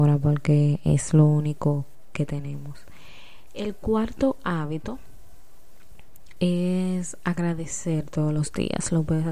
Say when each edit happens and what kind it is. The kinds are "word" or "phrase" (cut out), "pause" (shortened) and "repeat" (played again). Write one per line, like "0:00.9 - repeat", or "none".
none